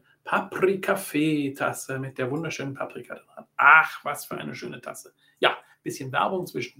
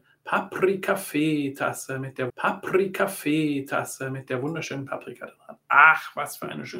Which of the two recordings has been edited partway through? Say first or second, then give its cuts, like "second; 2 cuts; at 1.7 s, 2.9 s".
second; 1 cut; at 2.3 s